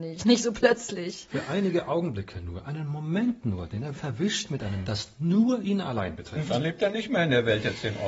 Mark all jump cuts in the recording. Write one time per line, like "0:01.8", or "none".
0:03.9
0:04.8